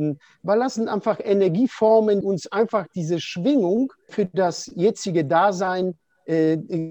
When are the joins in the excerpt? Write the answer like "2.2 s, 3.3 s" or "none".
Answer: 2.2 s, 4.1 s